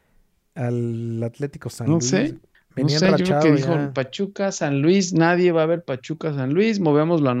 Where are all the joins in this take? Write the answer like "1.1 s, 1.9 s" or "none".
2.5 s